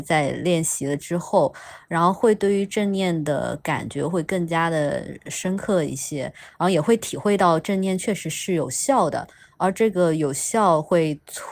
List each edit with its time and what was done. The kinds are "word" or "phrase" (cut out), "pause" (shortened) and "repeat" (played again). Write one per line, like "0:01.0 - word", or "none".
none